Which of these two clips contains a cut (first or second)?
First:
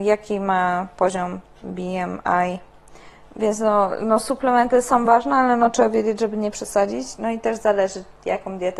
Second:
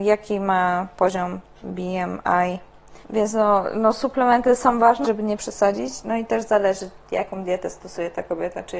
second